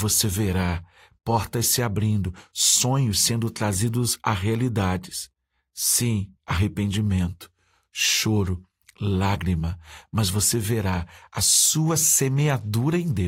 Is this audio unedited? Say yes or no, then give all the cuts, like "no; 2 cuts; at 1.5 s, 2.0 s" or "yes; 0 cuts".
no; 1 cut; at 6.4 s